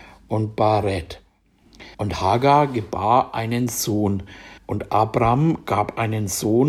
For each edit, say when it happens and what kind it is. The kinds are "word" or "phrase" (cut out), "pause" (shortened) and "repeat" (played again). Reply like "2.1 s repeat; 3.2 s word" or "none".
1.9 s pause; 4.6 s pause